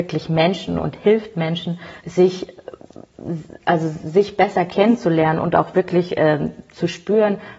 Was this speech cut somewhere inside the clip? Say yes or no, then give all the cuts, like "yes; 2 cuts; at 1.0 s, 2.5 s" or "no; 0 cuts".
yes; 1 cut; at 2.0 s